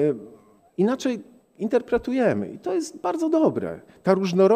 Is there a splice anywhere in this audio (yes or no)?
no